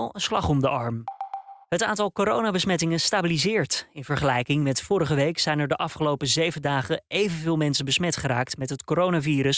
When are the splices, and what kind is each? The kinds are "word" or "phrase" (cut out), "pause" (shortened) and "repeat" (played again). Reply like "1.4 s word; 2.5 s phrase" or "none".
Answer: 1.6 s pause